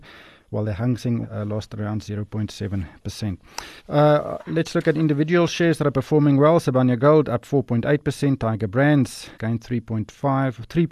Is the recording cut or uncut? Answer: cut